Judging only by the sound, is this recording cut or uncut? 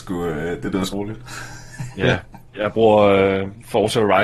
cut